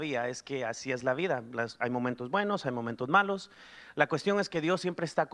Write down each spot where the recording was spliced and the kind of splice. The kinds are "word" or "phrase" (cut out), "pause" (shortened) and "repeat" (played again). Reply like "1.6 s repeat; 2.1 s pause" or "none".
none